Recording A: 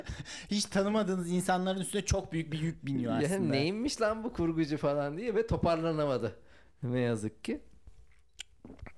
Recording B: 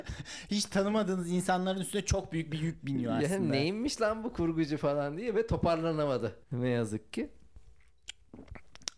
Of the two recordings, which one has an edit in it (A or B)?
B